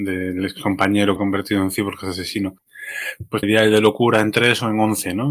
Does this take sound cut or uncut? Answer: cut